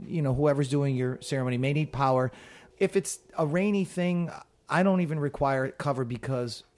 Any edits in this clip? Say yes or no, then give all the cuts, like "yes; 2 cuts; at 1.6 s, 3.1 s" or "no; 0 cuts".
no; 0 cuts